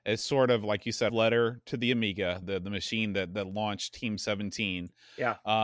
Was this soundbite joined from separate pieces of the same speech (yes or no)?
yes